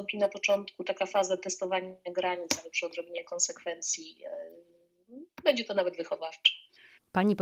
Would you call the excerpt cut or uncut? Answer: uncut